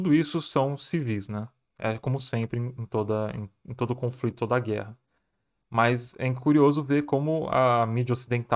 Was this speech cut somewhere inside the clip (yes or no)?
no